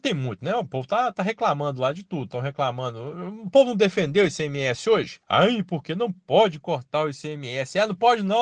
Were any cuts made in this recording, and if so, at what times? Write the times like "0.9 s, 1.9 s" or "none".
5.2 s